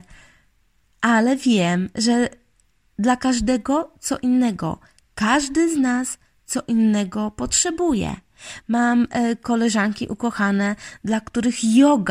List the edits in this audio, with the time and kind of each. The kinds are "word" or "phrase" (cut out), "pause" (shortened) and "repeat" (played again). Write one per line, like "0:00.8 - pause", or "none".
none

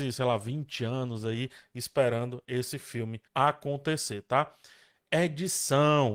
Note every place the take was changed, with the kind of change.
0:03.3 - pause

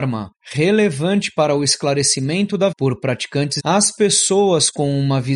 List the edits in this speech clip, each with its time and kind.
0:02.7 - word
0:03.6 - word

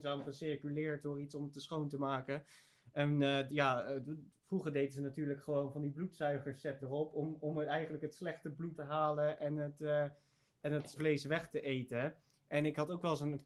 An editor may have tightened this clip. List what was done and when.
0:01.0 - word
0:03.5 - word
0:06.8 - word
0:08.7 - word
0:11.0 - word
0:11.5 - word

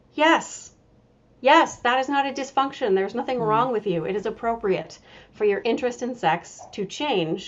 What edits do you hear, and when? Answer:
none

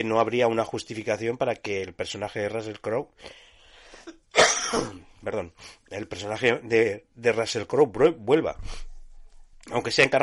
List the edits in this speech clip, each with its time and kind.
none

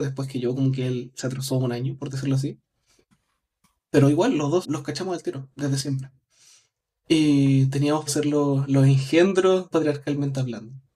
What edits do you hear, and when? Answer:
0:04.6 - word
0:08.1 - word
0:09.7 - word

